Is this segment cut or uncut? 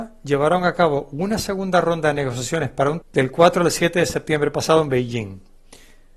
cut